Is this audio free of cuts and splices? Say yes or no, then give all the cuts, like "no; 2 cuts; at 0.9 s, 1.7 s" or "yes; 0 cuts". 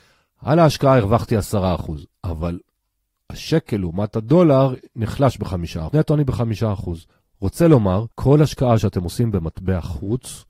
no; 3 cuts; at 5.9 s, 7.1 s, 8.1 s